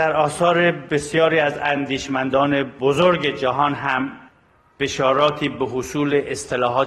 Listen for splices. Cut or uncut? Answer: uncut